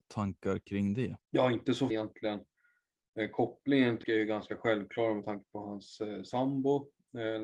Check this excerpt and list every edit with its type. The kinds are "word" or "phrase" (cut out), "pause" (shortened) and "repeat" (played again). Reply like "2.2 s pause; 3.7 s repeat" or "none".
1.2 s pause; 1.9 s word; 4.0 s word